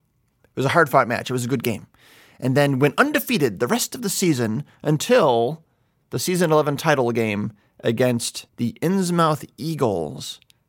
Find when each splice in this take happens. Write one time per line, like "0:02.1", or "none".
0:08.5